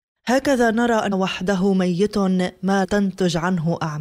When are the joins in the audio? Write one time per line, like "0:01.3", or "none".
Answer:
0:01.1
0:02.8